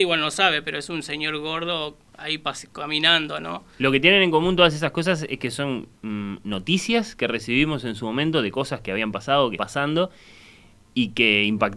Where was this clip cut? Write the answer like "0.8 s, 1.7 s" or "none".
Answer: 2.1 s, 6.0 s, 9.6 s